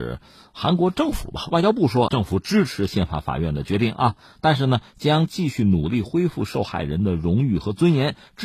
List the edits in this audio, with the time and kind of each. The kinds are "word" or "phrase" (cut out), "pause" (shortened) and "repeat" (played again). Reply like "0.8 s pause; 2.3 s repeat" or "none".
2.1 s word